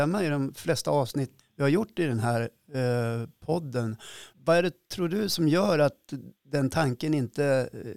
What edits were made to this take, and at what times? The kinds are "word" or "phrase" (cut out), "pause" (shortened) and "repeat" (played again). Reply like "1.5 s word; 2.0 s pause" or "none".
1.4 s word; 4.3 s pause